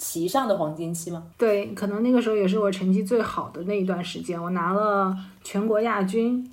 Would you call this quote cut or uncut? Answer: cut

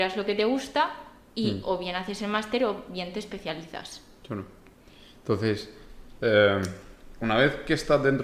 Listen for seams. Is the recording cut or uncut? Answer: uncut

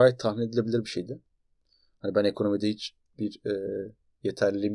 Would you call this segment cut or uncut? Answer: uncut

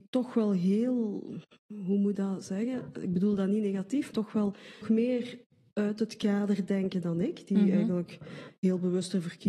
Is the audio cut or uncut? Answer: cut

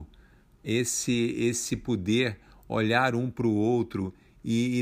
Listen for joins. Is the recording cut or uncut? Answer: uncut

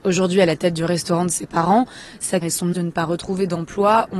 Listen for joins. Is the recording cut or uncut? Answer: cut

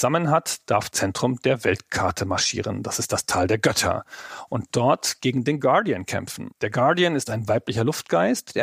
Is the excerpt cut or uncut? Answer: cut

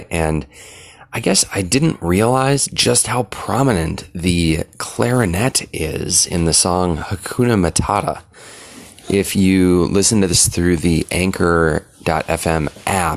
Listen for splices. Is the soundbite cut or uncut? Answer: uncut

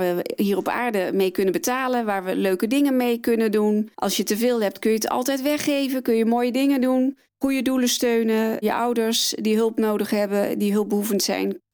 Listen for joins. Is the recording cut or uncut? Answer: cut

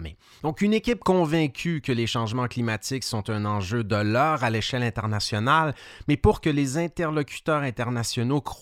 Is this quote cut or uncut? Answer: uncut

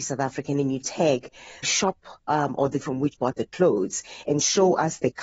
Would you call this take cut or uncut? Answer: cut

